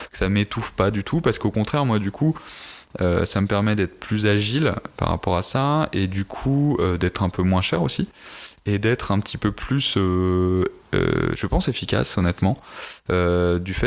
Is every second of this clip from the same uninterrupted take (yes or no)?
yes